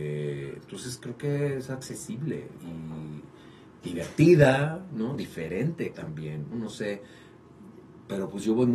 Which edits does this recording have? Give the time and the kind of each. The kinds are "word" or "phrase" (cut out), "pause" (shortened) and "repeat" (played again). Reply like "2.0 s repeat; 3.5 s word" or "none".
2.6 s word; 5.9 s word; 6.5 s word